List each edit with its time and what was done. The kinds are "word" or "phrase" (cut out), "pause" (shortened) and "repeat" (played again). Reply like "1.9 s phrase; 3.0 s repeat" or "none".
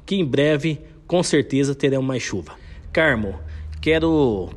none